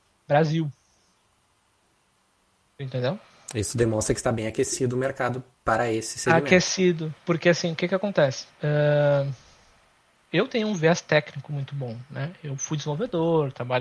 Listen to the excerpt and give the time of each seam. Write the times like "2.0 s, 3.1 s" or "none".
7.2 s